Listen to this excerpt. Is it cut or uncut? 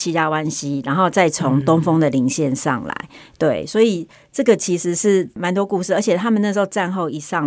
uncut